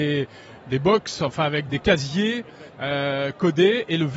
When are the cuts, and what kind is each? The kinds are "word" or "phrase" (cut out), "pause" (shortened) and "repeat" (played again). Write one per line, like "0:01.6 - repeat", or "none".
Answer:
0:01.7 - word
0:02.7 - pause